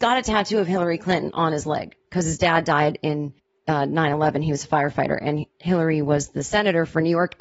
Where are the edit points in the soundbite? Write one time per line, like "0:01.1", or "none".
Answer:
0:02.0
0:03.4
0:05.5